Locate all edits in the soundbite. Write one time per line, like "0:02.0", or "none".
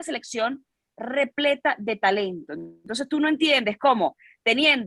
none

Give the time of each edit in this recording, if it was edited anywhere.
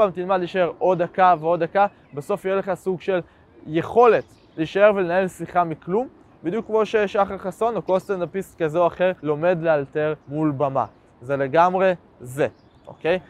0:09.2
0:10.2

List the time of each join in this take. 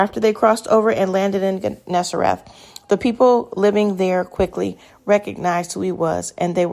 none

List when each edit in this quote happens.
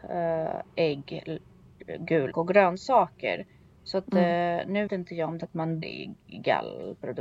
0:02.3
0:04.9
0:05.4
0:05.8

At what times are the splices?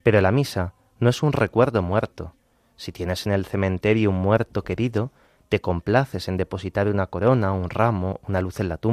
none

